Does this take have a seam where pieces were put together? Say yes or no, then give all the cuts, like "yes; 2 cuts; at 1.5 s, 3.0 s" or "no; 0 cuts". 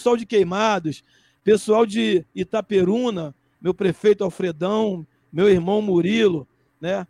no; 0 cuts